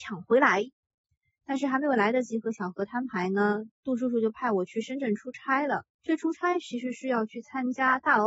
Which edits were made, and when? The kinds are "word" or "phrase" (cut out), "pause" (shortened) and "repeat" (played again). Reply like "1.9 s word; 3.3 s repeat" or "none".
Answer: 5.9 s pause